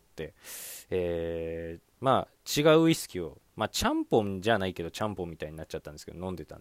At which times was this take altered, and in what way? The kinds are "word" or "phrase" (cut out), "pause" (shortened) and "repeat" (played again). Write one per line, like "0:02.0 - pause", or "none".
0:01.9 - pause
0:03.5 - pause